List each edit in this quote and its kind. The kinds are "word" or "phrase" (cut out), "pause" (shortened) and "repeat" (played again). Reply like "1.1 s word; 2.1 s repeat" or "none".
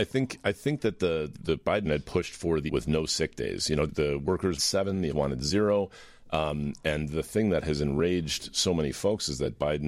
1.3 s word; 1.8 s word; 2.7 s word; 3.9 s word; 4.6 s word; 5.1 s word